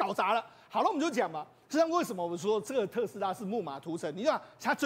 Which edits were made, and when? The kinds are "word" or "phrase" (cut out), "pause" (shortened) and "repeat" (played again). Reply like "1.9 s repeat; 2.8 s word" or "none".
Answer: none